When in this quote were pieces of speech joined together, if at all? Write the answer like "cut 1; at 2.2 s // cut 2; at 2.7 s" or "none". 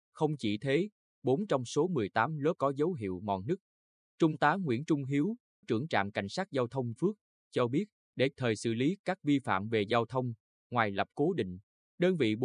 cut 1; at 2.6 s // cut 2; at 5.6 s // cut 3; at 7.0 s // cut 4; at 8.3 s // cut 5; at 11.1 s